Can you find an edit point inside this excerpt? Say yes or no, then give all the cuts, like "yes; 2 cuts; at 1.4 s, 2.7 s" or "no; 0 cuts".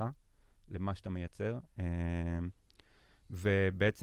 no; 0 cuts